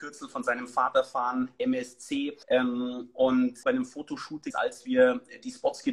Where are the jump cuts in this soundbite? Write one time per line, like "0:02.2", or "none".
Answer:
0:02.4
0:03.6
0:04.5